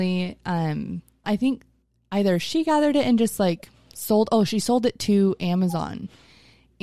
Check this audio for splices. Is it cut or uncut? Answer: cut